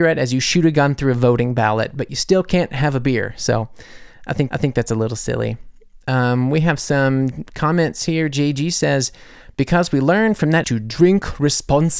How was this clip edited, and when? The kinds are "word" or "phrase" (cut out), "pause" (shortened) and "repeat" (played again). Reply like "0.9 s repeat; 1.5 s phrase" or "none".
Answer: 4.5 s repeat; 10.6 s word